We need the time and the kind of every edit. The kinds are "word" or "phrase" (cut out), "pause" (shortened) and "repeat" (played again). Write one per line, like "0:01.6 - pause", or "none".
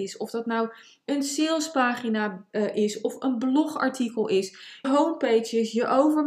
0:04.8 - word